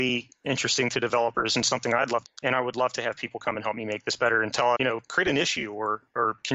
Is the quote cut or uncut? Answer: cut